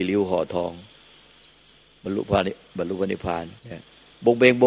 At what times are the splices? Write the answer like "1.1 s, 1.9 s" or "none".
3.6 s